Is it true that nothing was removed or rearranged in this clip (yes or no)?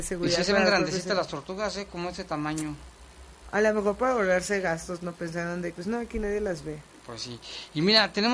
no